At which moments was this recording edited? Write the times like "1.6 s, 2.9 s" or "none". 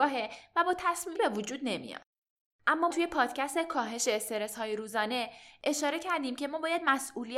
1.1 s, 2.9 s